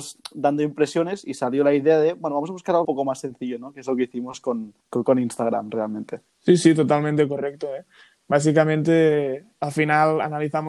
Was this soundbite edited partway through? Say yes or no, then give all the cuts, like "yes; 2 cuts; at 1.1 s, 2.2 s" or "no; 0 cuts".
yes; 3 cuts; at 2.8 s, 4.8 s, 6.3 s